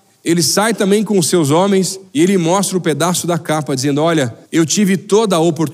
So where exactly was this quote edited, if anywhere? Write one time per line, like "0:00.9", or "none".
0:02.1
0:04.4